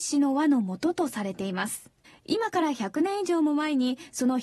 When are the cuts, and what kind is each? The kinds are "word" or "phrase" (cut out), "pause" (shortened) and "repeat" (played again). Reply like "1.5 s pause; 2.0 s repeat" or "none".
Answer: 2.0 s pause